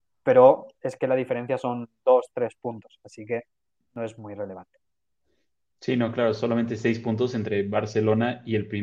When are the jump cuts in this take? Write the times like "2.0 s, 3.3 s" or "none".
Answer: none